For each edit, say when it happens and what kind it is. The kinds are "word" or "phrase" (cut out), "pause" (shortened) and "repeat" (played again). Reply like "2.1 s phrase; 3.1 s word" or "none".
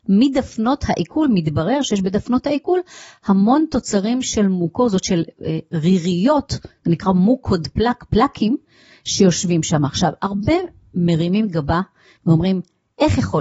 none

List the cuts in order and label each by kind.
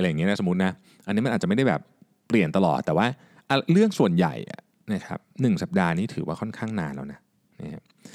none

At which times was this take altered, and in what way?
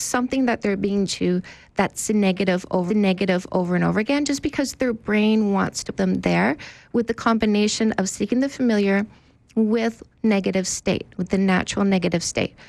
1.1 s word; 2.9 s repeat; 5.9 s word; 10.1 s pause

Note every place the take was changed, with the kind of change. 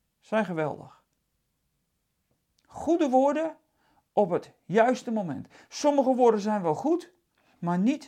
none

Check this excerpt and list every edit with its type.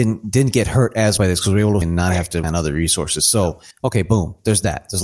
1.2 s word; 1.8 s phrase; 2.4 s word; 3.7 s pause

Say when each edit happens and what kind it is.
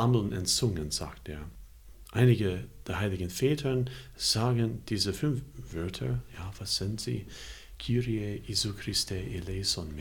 none

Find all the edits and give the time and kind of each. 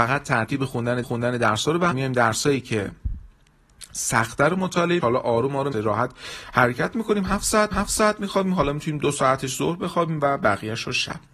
1.0 s repeat; 1.9 s phrase; 5.0 s phrase; 5.7 s phrase; 7.7 s repeat

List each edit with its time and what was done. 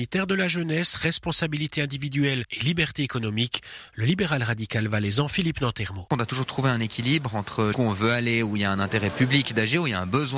7.7 s word

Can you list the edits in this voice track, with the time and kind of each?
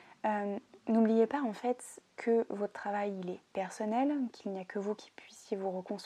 2.1 s pause

